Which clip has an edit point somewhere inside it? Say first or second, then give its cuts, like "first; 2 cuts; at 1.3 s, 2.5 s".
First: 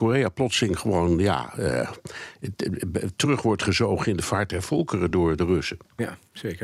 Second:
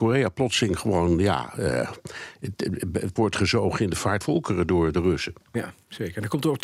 second; 2 cuts; at 3.2 s, 4.2 s